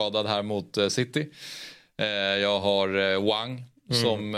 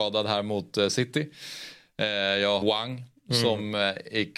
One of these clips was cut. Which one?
second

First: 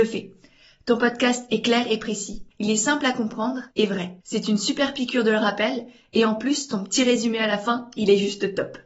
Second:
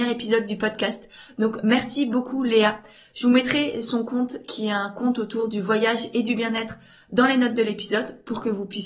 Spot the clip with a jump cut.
first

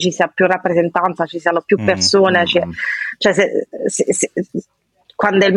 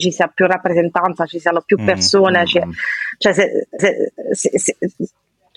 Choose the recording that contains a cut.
second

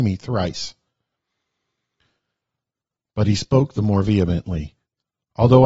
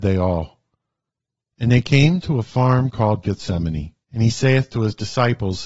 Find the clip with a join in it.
second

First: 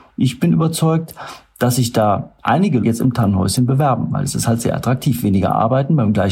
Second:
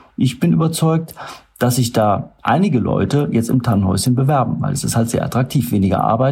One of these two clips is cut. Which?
first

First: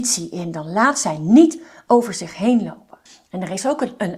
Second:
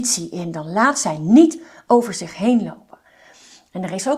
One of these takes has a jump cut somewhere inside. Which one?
first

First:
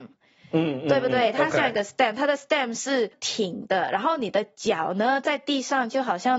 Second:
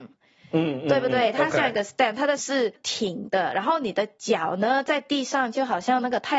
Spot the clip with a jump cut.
second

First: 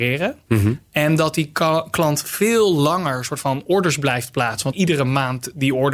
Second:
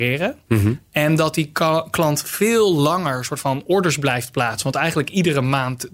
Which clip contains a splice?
first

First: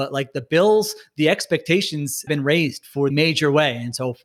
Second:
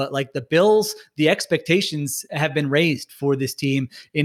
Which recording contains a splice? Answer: first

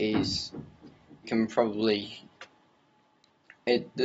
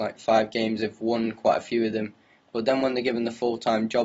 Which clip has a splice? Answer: first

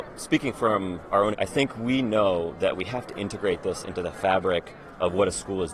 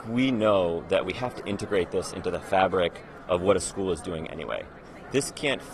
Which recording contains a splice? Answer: first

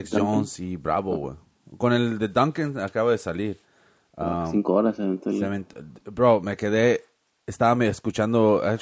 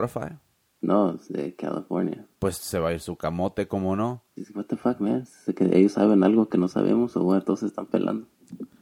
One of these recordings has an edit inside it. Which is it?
second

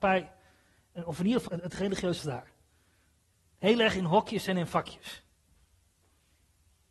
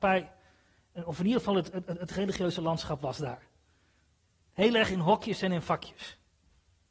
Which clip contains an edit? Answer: first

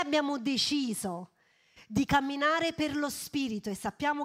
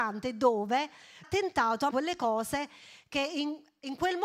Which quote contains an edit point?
second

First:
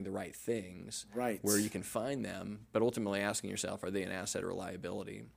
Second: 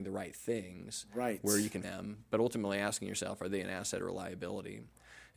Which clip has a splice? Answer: second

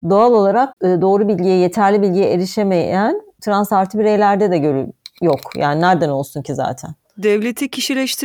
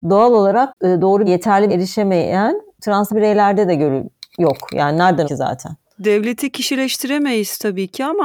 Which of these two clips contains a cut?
second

